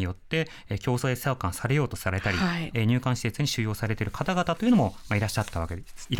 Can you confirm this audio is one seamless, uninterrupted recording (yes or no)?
no